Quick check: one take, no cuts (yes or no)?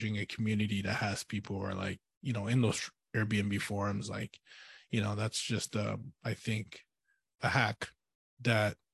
yes